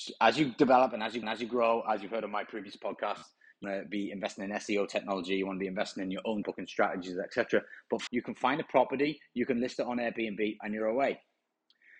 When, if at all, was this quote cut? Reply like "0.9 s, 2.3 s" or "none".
1.2 s, 3.6 s, 6.4 s, 8.1 s